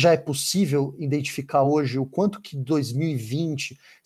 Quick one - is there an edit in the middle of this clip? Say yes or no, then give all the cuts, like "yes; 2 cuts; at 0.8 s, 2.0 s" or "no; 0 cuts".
no; 0 cuts